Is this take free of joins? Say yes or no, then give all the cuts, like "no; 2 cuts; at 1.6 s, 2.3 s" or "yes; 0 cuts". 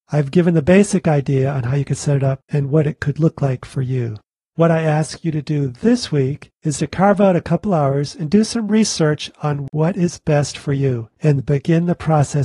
yes; 0 cuts